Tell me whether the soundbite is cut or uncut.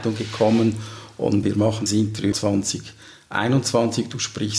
cut